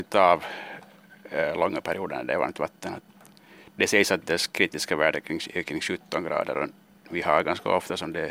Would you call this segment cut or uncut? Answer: uncut